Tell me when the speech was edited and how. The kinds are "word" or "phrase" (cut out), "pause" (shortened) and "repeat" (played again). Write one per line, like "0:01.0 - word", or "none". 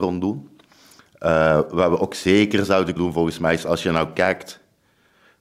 0:03.0 - word